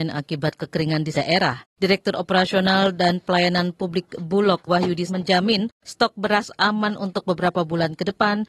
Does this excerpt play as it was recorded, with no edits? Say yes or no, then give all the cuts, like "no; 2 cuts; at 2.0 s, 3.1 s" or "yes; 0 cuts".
no; 3 cuts; at 1.1 s, 4.7 s, 5.1 s